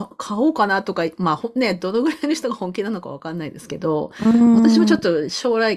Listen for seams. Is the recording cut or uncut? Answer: uncut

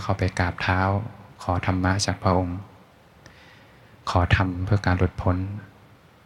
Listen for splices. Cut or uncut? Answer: uncut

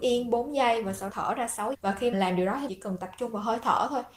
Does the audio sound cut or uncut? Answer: cut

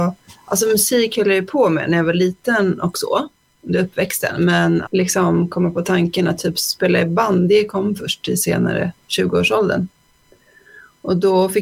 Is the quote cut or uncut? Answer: cut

